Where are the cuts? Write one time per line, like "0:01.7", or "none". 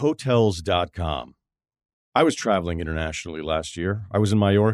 none